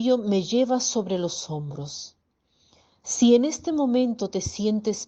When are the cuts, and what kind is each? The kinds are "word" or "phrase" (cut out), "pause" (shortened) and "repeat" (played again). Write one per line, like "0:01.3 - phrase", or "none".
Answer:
none